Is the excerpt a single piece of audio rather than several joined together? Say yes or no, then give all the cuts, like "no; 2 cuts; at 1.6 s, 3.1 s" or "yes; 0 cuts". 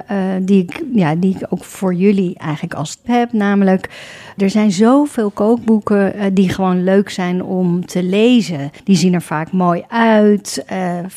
no; 3 cuts; at 3.0 s, 4.4 s, 8.8 s